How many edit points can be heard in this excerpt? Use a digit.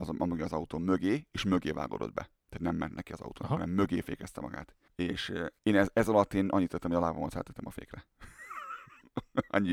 3